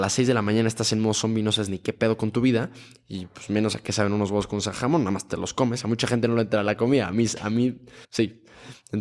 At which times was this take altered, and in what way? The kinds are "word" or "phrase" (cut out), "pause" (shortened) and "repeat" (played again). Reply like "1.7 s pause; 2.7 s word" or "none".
8.0 s pause